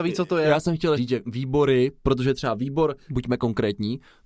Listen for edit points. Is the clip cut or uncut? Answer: cut